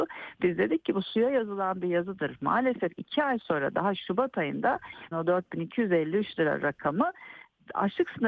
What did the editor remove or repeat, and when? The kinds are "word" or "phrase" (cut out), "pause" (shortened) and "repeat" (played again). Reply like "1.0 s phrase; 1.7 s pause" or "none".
5.1 s word